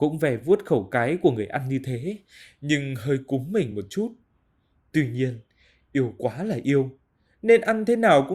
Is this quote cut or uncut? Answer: uncut